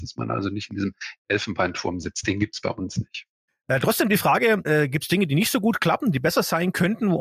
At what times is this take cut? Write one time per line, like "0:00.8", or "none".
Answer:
none